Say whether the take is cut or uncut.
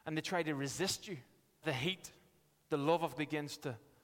cut